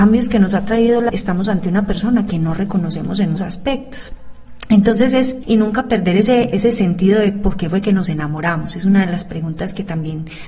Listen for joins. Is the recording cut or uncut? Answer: cut